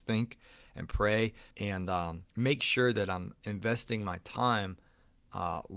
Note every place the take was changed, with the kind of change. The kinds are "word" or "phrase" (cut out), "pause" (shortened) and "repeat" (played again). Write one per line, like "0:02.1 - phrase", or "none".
0:01.5 - pause
0:02.3 - pause

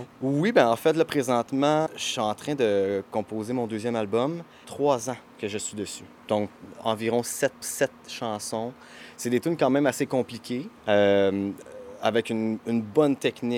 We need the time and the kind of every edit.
0:01.9 - word
0:04.6 - phrase
0:06.2 - pause
0:07.6 - repeat
0:10.8 - pause

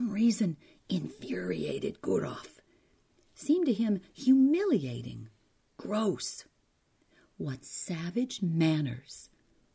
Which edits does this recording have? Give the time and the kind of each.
none

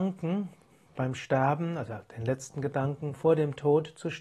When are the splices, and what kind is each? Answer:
none

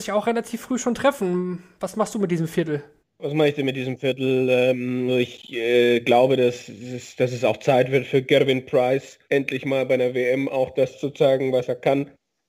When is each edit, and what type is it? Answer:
0:03.0 - pause
0:05.1 - word
0:09.2 - pause

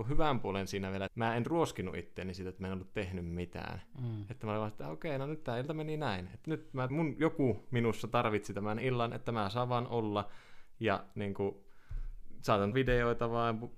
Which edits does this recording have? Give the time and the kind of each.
0:01.1 - word
0:06.4 - word
0:06.9 - word
0:12.7 - word

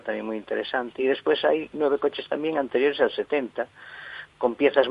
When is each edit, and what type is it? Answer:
none

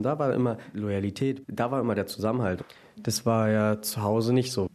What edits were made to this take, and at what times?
none

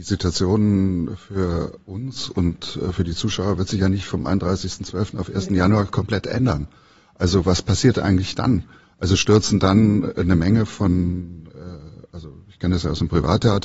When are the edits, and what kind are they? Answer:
none

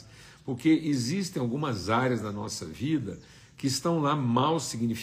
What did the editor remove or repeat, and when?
none

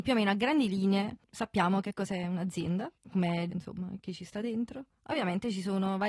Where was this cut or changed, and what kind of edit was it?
0:03.0 - pause
0:03.5 - word

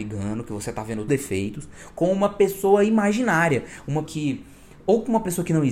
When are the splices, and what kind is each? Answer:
0:01.1 - phrase
0:04.0 - word

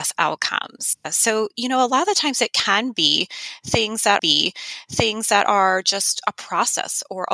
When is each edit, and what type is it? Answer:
0:01.0 - pause
0:04.2 - repeat

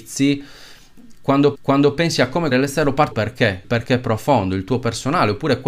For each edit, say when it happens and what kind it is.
0:01.6 - repeat
0:02.5 - word
0:03.1 - phrase
0:03.6 - word

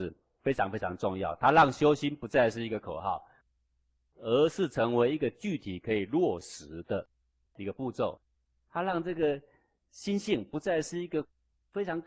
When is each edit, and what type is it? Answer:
none

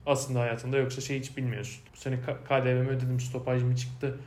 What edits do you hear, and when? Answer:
0:01.9 - pause

